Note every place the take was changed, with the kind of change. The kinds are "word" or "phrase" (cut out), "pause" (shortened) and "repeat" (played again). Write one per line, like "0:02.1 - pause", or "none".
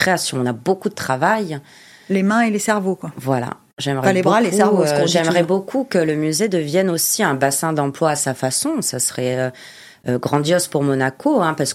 none